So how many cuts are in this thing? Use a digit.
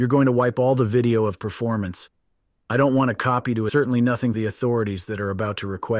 3